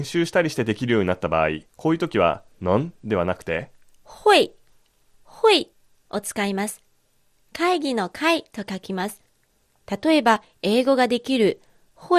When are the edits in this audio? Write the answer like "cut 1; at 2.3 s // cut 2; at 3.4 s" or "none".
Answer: cut 1; at 1.7 s // cut 2; at 5.7 s